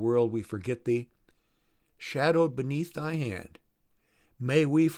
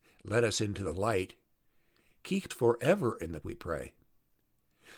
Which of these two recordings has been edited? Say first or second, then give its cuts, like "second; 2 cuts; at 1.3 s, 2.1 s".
second; 2 cuts; at 2.5 s, 3.4 s